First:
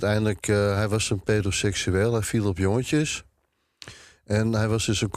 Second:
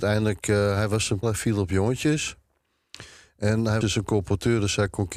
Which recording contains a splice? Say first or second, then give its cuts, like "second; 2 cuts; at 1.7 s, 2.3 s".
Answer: second; 2 cuts; at 1.2 s, 3.8 s